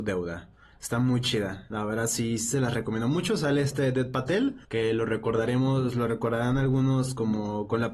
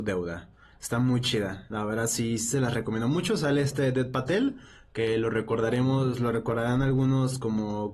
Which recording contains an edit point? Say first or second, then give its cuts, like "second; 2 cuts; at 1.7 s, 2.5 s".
first; 1 cut; at 4.6 s